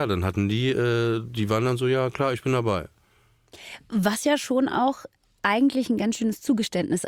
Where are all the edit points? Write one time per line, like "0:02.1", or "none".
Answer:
none